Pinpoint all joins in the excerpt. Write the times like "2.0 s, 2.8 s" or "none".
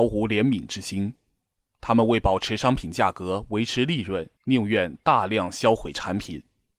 4.4 s